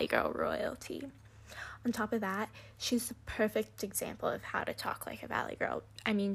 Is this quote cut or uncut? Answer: uncut